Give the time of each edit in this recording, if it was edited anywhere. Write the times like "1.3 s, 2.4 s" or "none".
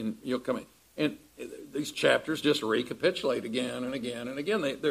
none